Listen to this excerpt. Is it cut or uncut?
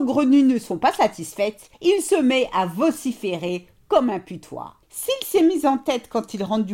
cut